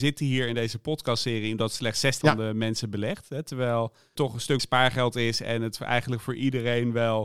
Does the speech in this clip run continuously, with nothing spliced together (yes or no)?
no